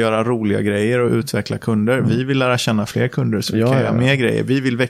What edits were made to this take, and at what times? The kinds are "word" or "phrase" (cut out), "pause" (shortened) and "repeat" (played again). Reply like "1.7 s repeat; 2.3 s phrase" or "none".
none

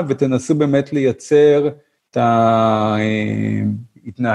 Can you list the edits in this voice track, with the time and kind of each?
2.1 s word

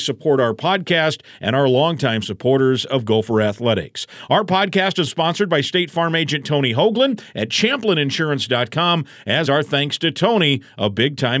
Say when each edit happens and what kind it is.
5.1 s word; 9.5 s word

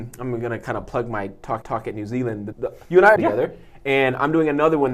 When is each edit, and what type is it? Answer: 1.6 s repeat; 2.5 s word; 2.8 s pause; 3.2 s phrase

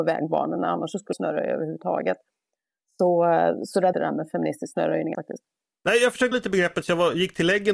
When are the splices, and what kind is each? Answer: 1.1 s phrase; 3.9 s phrase; 5.1 s word; 6.3 s word

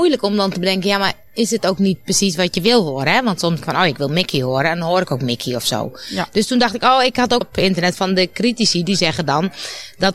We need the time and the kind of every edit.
3.6 s word; 7.4 s word

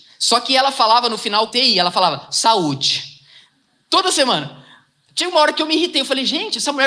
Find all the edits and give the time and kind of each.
1.5 s word

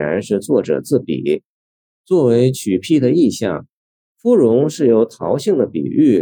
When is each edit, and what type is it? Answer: none

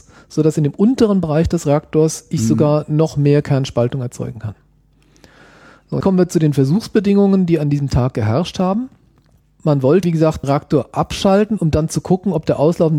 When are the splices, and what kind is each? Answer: 6.0 s word; 10.0 s word; 10.4 s word

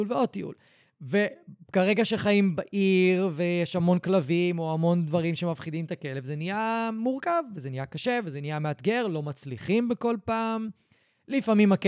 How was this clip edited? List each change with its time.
none

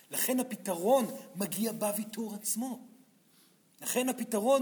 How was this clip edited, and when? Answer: none

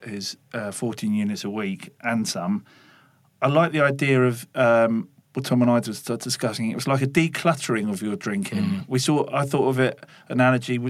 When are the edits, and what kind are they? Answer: none

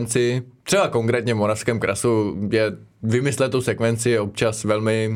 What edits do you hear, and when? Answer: none

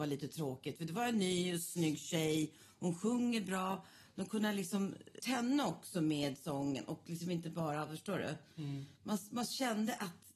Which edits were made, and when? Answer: 5.2 s word

